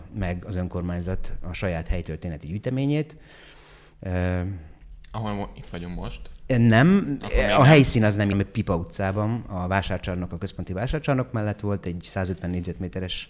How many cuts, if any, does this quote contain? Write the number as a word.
one